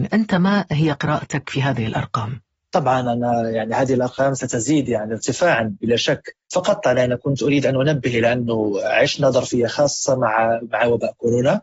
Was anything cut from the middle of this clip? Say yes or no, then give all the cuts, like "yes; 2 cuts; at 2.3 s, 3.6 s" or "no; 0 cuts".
no; 0 cuts